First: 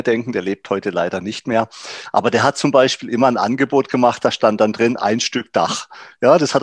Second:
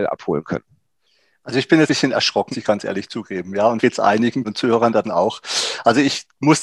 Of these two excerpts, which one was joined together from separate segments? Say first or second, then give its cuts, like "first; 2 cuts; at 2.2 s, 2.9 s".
second; 5 cuts; at 1.9 s, 2.5 s, 3.8 s, 4.4 s, 5.0 s